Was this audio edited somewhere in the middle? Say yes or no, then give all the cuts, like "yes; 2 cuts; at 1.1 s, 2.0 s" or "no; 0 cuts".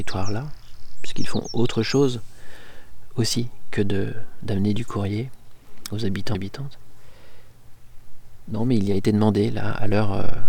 yes; 1 cut; at 6.3 s